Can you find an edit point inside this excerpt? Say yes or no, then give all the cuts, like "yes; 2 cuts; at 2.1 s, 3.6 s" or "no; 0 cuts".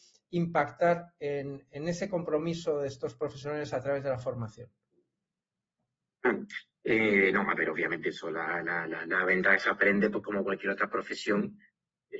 yes; 1 cut; at 6.7 s